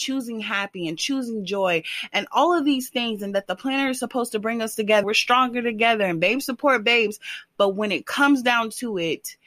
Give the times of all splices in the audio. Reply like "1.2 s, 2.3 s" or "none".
5.0 s